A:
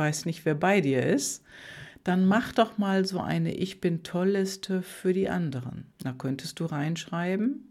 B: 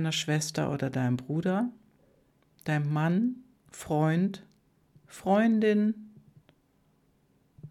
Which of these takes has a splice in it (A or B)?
A